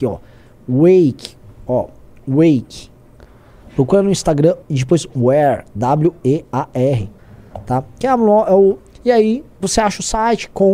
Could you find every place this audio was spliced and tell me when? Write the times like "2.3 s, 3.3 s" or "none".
4.6 s